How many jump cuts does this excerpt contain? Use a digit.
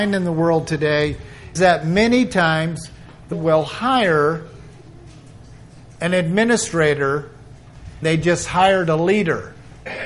3